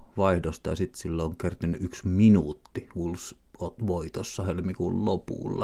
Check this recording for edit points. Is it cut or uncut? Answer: uncut